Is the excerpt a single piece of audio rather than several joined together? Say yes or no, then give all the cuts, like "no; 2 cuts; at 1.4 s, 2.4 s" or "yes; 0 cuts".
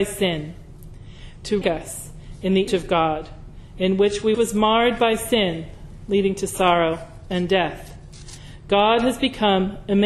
no; 3 cuts; at 1.6 s, 2.7 s, 4.3 s